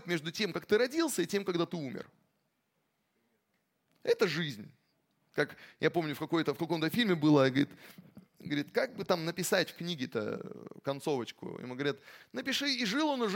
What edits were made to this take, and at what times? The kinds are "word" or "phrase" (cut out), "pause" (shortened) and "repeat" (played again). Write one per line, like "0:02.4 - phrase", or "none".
none

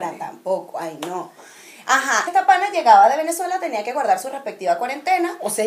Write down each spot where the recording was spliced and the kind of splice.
0:02.3 - word

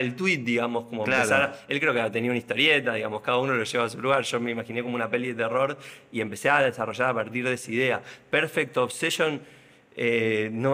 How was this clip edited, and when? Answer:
none

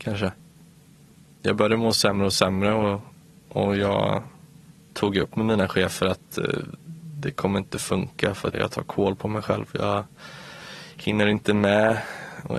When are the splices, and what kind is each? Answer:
0:08.5 - word

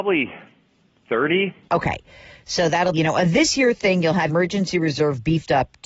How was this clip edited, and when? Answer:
0:02.9 - word
0:04.3 - word

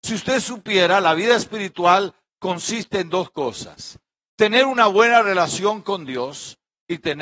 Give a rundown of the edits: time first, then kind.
none

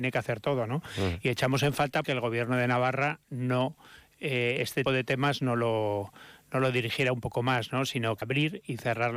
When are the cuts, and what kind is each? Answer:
0:02.0 - word
0:04.9 - word
0:08.2 - phrase

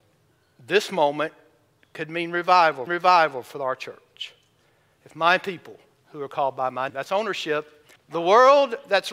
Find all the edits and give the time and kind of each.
0:02.9 - repeat
0:06.9 - word
0:08.0 - pause

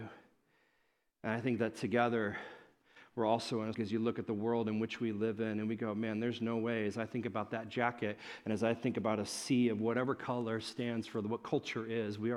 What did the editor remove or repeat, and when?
0:03.7 - word

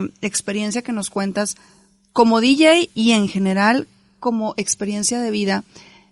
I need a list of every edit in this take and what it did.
none

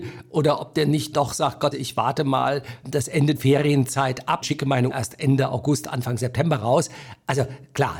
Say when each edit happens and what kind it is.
0:01.1 - word
0:01.7 - word
0:02.8 - word
0:03.3 - word
0:04.4 - word
0:04.9 - word

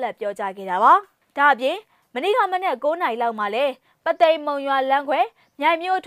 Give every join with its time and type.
none

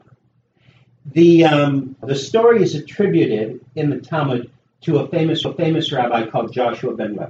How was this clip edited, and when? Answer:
0:02.0 - word
0:05.4 - repeat

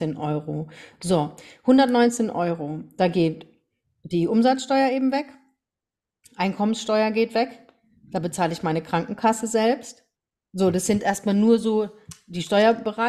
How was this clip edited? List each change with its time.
none

